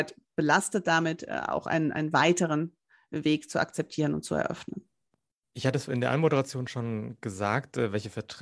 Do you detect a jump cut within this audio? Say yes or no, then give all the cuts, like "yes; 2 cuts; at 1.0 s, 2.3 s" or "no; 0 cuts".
no; 0 cuts